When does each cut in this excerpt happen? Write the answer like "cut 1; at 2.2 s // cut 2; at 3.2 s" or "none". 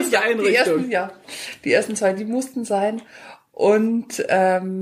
none